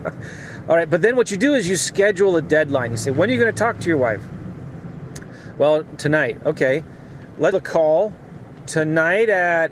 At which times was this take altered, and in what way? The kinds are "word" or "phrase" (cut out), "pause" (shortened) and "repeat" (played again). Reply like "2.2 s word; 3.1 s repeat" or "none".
7.5 s word

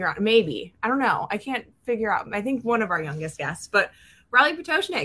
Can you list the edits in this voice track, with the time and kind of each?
none

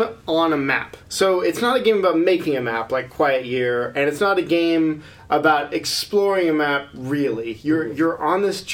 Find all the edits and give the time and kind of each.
1.0 s pause

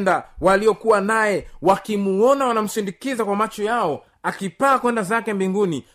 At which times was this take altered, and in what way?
none

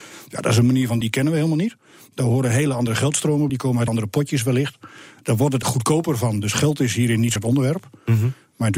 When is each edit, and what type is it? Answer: 1.0 s word; 3.5 s word; 3.9 s word; 5.6 s word; 7.4 s word

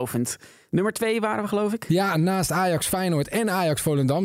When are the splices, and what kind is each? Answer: none

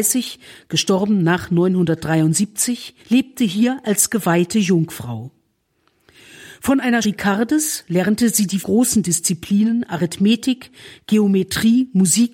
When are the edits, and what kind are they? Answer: 3.0 s pause; 7.0 s word; 8.6 s word

